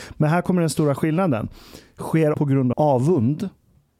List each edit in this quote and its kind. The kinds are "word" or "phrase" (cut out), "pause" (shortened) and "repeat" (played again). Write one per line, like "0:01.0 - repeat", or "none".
0:02.3 - word
0:02.7 - word